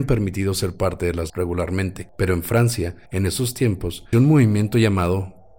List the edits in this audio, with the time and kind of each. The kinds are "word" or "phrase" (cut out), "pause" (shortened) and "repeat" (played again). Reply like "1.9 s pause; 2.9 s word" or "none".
1.3 s word; 2.1 s pause; 3.1 s pause; 4.1 s phrase

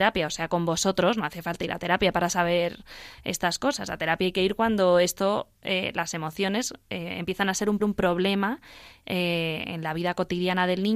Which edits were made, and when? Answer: 7.8 s repeat

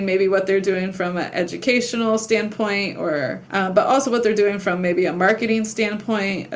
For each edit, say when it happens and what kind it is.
none

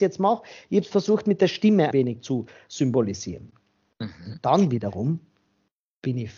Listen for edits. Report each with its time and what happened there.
1.9 s word

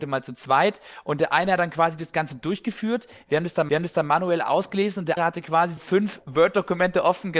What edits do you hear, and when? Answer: 3.7 s repeat; 5.2 s word; 5.8 s word

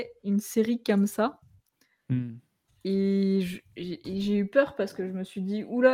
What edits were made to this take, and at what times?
none

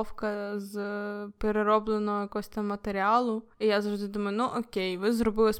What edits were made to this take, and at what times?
3.5 s pause

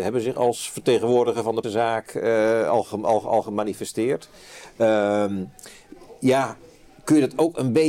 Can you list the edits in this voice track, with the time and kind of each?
1.6 s word

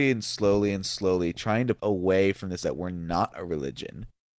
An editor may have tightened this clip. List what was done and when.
1.8 s word; 2.6 s word

